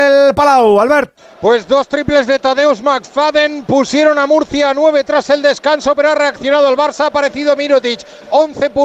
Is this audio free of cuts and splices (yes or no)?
yes